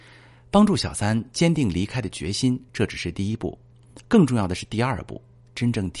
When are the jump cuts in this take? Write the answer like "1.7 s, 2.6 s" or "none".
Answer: 2.7 s